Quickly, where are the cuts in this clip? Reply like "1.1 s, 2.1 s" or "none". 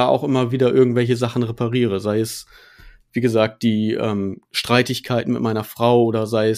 none